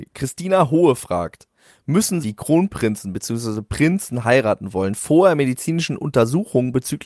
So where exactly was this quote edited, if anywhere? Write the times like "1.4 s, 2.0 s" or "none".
2.2 s

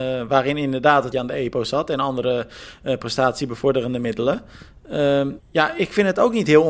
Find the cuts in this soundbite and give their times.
1.1 s, 5.4 s

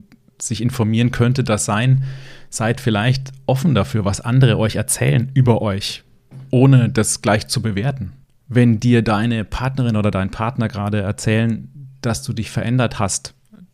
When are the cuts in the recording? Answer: 8.2 s

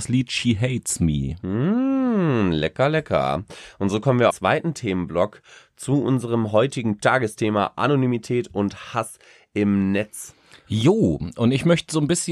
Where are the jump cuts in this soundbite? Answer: 4.3 s

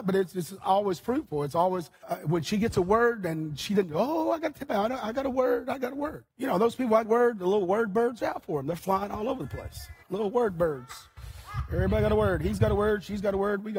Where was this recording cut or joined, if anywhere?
2.0 s, 4.6 s, 6.3 s, 7.0 s, 8.2 s, 10.0 s

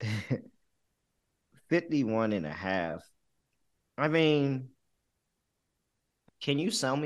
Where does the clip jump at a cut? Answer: none

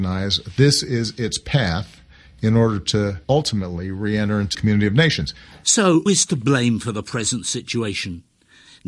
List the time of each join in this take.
3.2 s, 4.5 s, 6.1 s

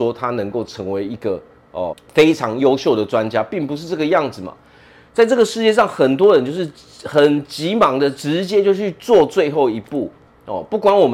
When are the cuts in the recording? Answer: 1.9 s

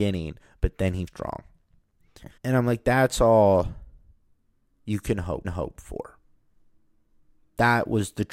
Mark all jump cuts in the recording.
1.1 s, 2.4 s, 5.4 s

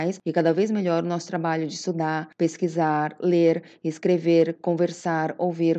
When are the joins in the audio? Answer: none

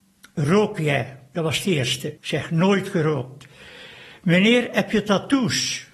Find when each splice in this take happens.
2.2 s

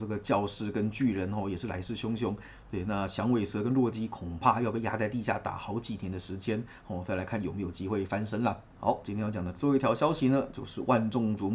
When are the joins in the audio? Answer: 8.7 s

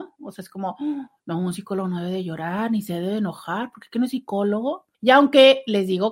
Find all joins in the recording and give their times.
4.9 s

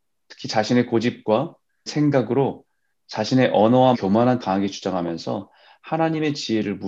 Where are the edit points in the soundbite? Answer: 1.9 s, 3.9 s, 4.4 s

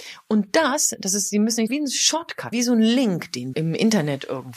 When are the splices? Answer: 1.7 s, 2.5 s, 3.5 s

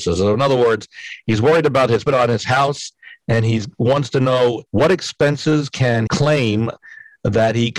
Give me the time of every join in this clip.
2.1 s, 4.7 s, 6.1 s

